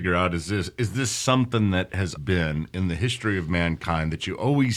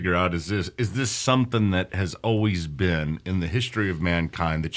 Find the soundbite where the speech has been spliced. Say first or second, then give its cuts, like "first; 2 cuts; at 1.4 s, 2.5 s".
first; 1 cut; at 2.2 s